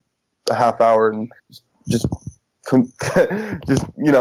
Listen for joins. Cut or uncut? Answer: cut